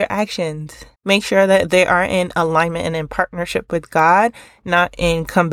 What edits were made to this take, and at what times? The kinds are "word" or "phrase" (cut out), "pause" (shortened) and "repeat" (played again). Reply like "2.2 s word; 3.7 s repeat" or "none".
0.9 s pause

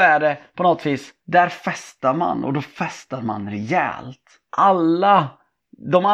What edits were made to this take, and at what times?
1.2 s pause; 4.4 s pause

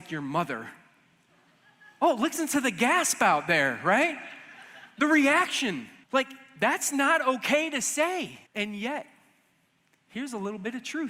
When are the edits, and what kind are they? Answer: 6.0 s pause; 8.5 s pause

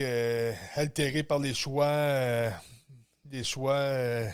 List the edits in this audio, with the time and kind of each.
none

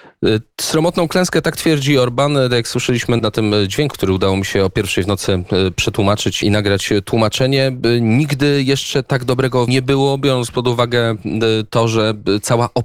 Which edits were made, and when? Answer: 3.2 s word; 3.9 s word; 6.4 s word; 9.7 s word

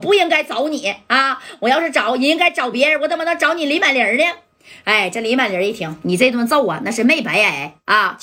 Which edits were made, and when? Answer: 6.0 s phrase

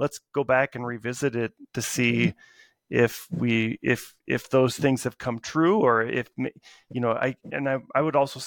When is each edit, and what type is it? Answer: 1.7 s pause

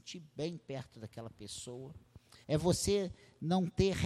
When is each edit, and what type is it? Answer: 2.4 s pause

